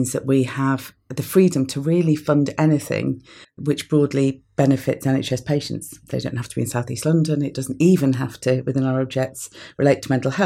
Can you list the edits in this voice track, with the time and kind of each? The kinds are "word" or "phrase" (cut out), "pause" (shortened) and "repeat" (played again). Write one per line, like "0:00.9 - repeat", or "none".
0:03.4 - pause